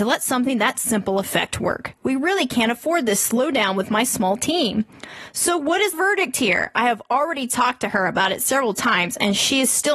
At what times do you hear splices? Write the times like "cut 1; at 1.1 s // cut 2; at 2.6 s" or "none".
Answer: cut 1; at 5.9 s